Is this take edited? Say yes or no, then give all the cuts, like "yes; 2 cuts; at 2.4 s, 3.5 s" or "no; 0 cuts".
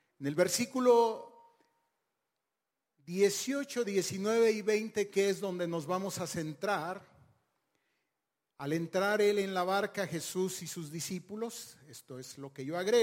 no; 0 cuts